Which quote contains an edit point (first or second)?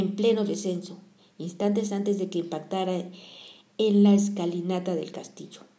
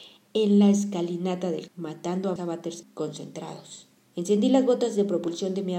second